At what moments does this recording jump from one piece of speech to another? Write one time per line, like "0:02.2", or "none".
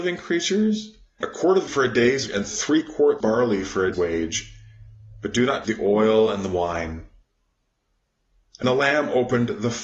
0:01.2
0:01.7
0:02.3
0:03.2
0:03.9
0:05.6
0:08.6